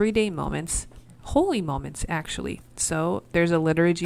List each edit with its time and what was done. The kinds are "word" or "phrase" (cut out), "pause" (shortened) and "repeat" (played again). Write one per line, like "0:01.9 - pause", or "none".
0:01.1 - pause